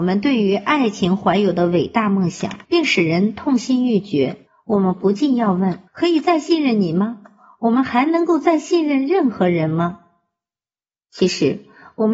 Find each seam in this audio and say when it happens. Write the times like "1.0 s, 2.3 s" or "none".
2.6 s, 4.5 s, 5.9 s